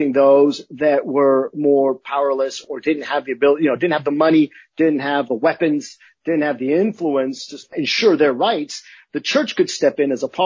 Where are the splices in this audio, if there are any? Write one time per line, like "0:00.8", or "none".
none